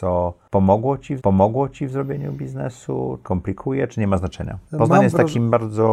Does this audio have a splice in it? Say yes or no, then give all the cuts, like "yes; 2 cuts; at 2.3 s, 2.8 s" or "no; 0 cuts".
yes; 3 cuts; at 1.2 s, 3.2 s, 4.7 s